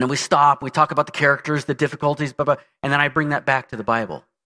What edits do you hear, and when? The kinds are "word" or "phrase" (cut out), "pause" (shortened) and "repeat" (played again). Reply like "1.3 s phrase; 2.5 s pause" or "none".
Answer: none